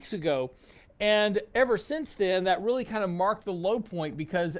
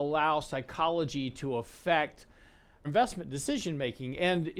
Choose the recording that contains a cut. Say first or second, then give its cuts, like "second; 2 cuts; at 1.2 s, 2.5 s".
second; 1 cut; at 2.8 s